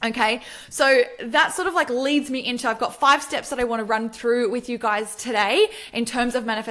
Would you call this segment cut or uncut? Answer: uncut